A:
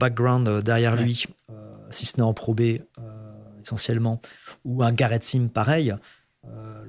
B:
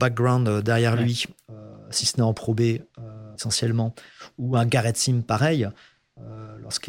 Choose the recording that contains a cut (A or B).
B